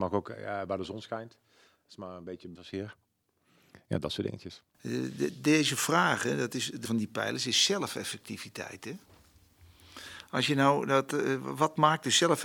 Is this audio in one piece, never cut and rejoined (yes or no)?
no